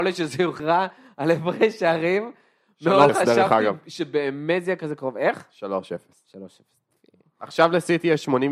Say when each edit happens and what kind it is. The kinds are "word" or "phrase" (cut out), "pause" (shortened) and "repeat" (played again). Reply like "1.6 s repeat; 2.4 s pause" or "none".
3.1 s phrase